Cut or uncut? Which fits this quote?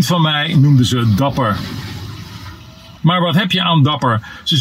cut